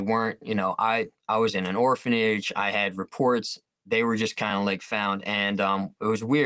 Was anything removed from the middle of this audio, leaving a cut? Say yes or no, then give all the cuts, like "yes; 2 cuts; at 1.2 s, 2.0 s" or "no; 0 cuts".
no; 0 cuts